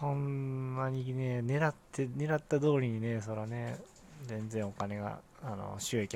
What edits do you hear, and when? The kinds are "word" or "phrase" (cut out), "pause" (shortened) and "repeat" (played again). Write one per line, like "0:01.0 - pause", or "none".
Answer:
0:01.8 - pause

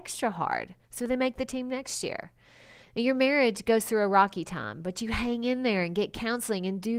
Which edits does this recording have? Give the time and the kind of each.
none

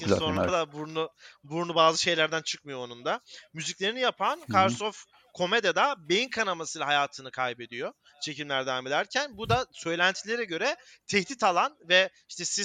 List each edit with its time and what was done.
none

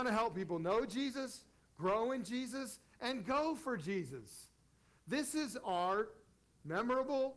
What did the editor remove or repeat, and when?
none

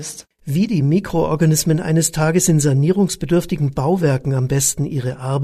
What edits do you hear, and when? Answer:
none

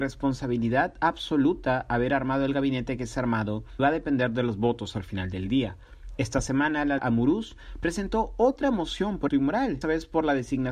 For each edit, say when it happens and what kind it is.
0:03.8 - word
0:07.0 - word
0:09.3 - word
0:09.8 - word

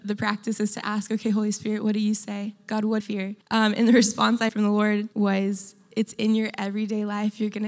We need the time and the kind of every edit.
0:03.0 - phrase
0:03.4 - pause
0:04.5 - word
0:05.1 - pause

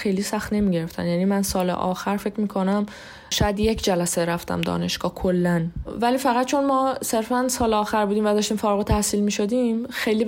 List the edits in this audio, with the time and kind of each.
none

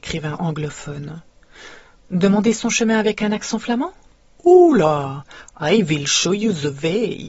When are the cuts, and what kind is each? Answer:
none

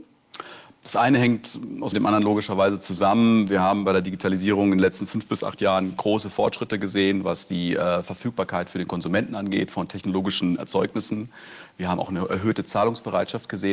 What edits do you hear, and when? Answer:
0:01.9 - phrase

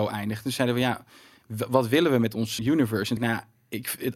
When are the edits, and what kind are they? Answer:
0:02.6 - word
0:03.2 - word

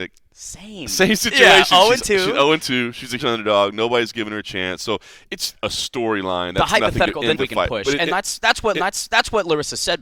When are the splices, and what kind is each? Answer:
0:03.2 - word
0:05.6 - phrase
0:07.4 - word
0:08.7 - repeat

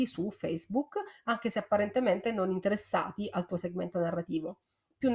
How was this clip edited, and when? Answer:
none

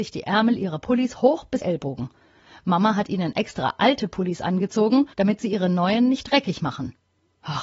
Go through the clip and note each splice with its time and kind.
0:01.6 - phrase
0:05.1 - pause

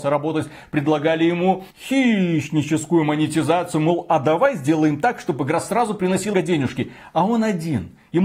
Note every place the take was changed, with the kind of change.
0:01.7 - pause
0:06.3 - word

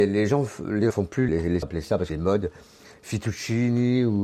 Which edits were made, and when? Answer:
0:00.9 - word
0:01.3 - word
0:01.6 - phrase
0:02.1 - phrase

